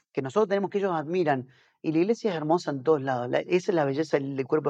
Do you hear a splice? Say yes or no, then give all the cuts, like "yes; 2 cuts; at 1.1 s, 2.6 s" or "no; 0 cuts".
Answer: no; 0 cuts